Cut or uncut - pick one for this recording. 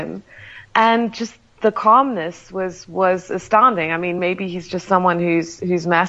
uncut